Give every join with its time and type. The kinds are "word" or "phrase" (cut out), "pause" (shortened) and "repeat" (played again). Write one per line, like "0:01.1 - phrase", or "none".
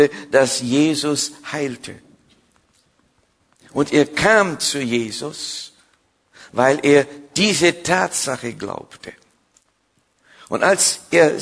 none